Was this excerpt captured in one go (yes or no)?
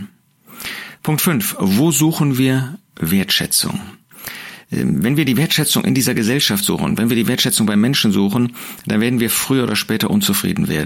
yes